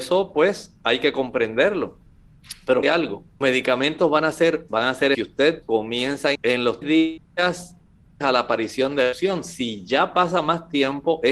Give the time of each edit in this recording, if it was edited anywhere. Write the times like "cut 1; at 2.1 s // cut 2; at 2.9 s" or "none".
cut 1; at 2.8 s // cut 2; at 3.4 s // cut 3; at 4.7 s // cut 4; at 5.1 s // cut 5; at 5.6 s // cut 6; at 6.3 s // cut 7; at 6.8 s // cut 8; at 8.2 s